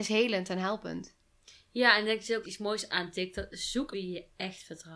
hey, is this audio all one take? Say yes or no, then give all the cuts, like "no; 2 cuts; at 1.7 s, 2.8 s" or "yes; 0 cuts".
no; 2 cuts; at 2.4 s, 3.9 s